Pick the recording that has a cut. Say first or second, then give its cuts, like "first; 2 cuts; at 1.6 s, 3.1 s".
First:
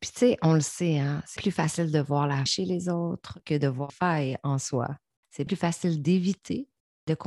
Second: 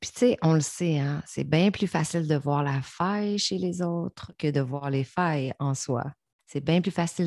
first; 4 cuts; at 1.4 s, 2.5 s, 3.9 s, 5.5 s